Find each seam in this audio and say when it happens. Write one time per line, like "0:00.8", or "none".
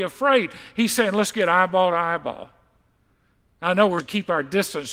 0:04.0

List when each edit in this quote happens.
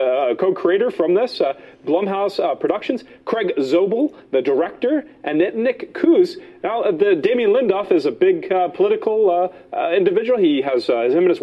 none

